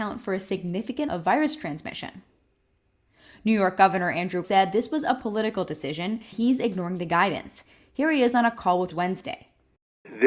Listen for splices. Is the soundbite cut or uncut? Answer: cut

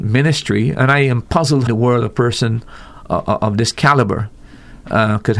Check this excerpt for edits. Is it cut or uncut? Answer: cut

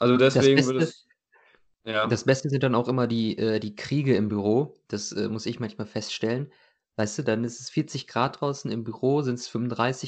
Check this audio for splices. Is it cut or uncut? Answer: uncut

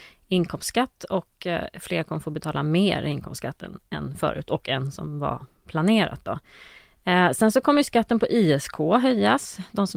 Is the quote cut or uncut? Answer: uncut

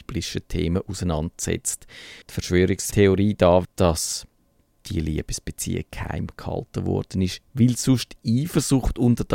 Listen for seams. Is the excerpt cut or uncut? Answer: cut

